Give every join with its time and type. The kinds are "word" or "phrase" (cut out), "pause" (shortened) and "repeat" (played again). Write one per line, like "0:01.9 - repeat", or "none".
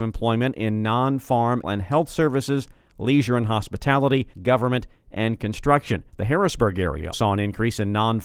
0:01.6 - word
0:04.3 - pause
0:06.1 - pause
0:07.1 - word

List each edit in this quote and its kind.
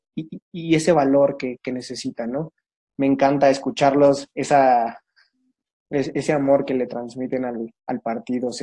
none

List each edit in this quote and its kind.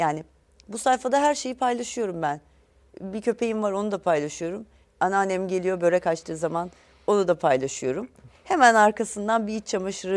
none

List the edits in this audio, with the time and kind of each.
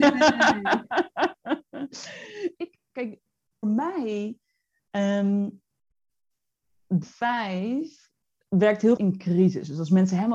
0:02.6 - word
0:03.6 - word
0:07.0 - word
0:09.0 - word

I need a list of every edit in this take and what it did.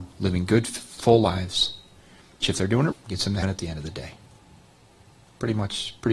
0:02.4 - word
0:02.9 - word
0:03.4 - word

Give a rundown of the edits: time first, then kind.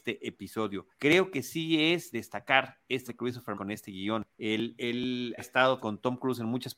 0:00.9 - pause
0:02.1 - word
0:03.1 - word
0:03.5 - word
0:04.3 - pause
0:05.4 - word
0:05.8 - word

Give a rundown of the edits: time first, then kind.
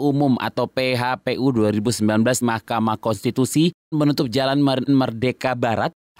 0:02.4 - word
0:03.9 - word
0:04.9 - word

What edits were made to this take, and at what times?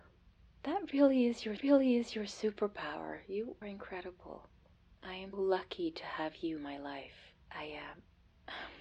0:01.6 - repeat
0:03.6 - word
0:04.7 - pause
0:05.3 - word
0:06.6 - word
0:07.4 - pause

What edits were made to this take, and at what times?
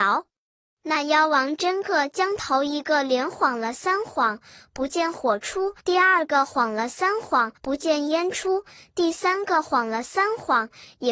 0:05.8 - pause
0:07.6 - pause

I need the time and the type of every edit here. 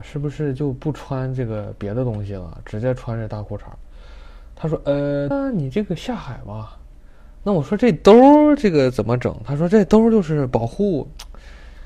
0:05.3 - phrase

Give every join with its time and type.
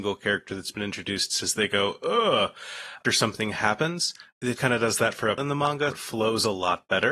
0:01.4 - word
0:03.0 - word
0:04.6 - word
0:05.4 - word
0:05.9 - word

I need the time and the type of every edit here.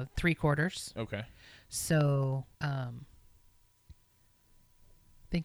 0:02.5 - pause

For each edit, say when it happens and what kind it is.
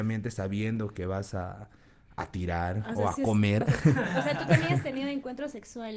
none

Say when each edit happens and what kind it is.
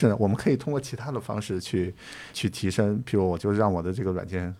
0:02.3 - word

